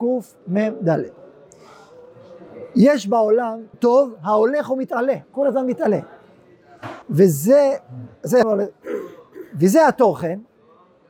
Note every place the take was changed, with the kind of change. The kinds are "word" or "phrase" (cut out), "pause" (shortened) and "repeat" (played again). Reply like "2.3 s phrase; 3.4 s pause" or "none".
3.7 s word; 5.2 s pause; 7.0 s pause; 8.4 s phrase